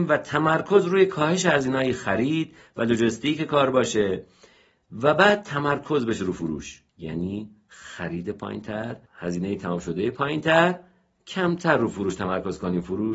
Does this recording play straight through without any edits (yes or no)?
no